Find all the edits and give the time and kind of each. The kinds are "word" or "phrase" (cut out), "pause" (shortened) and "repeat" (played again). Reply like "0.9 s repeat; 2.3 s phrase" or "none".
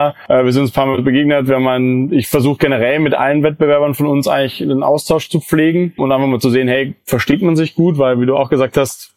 6.0 s word